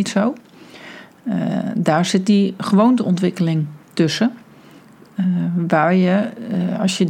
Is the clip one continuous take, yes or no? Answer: no